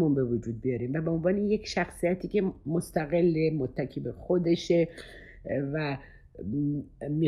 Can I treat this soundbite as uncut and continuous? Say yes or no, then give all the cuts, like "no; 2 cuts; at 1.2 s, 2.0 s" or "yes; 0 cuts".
yes; 0 cuts